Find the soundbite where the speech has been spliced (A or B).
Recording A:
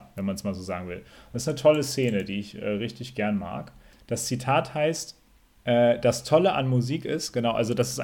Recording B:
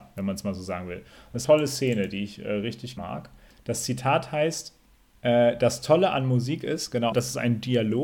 B